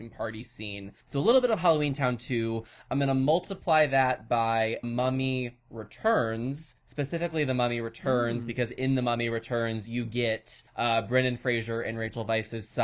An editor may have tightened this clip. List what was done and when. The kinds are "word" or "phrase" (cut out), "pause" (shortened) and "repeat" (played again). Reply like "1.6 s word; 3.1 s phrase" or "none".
1.0 s pause; 4.8 s word; 6.8 s pause; 10.7 s pause